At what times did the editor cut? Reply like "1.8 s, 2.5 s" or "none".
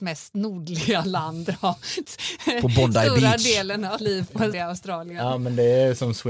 1.4 s, 2.0 s, 4.0 s, 4.5 s